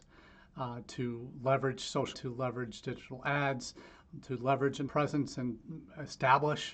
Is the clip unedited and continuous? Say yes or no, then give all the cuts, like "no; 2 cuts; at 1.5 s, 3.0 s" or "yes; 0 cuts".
no; 2 cuts; at 2.1 s, 4.9 s